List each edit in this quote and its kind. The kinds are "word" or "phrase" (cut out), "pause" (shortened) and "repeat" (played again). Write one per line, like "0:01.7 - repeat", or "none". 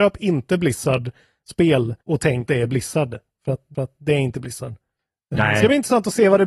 0:02.0 - pause
0:02.5 - word
0:03.7 - repeat
0:05.0 - pause